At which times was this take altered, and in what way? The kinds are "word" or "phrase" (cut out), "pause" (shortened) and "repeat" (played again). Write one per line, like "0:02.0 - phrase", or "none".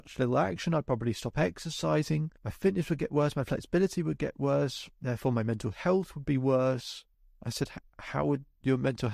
0:02.4 - pause
0:07.1 - pause